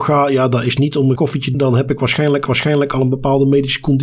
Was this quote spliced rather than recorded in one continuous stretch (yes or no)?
yes